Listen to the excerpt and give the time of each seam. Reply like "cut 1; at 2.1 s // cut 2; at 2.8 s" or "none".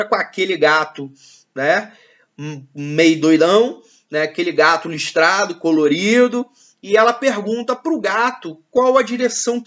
none